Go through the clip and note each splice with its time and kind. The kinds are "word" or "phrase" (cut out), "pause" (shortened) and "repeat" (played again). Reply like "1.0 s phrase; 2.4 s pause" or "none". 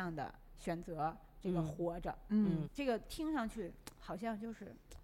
2.7 s word